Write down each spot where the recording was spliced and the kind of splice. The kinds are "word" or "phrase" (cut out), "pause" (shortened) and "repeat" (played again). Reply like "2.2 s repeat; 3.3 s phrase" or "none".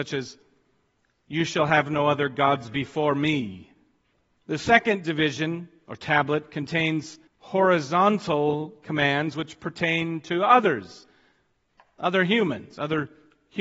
4.1 s pause; 7.3 s pause